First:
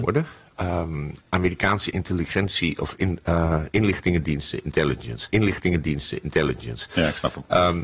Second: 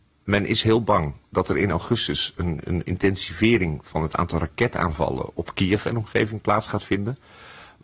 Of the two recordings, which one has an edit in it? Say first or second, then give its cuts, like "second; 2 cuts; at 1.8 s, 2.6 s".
first; 2 cuts; at 1.2 s, 5.3 s